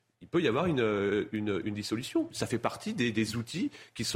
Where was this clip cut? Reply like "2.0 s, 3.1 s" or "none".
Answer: none

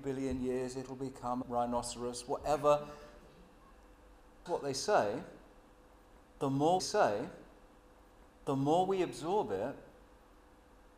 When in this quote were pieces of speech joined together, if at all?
1.4 s, 4.5 s, 6.8 s

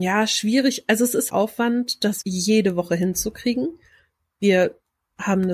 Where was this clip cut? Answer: 1.3 s, 2.2 s

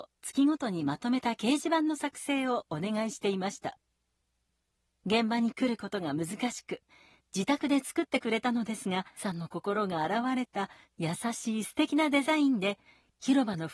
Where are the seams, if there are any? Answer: 9.2 s

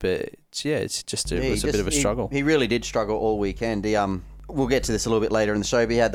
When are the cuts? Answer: none

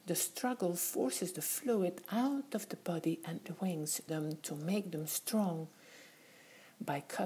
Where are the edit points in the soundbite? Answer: 3.4 s, 4.1 s

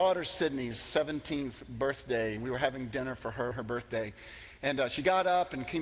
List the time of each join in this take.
3.5 s

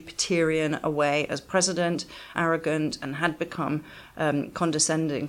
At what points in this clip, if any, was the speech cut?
2.3 s

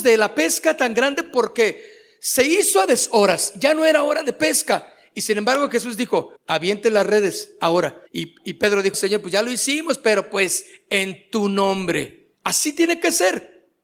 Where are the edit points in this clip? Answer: 6.4 s, 8.1 s, 8.9 s, 12.3 s

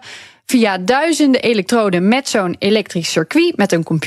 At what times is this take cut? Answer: none

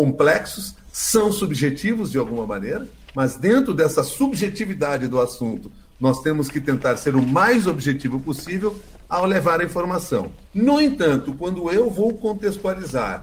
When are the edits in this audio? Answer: 10.4 s

